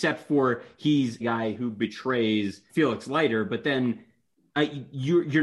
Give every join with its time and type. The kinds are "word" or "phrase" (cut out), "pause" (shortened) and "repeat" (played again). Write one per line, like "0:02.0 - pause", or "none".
0:01.2 - word
0:02.7 - word